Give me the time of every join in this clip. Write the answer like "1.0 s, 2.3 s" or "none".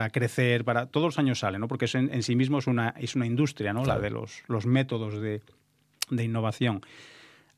none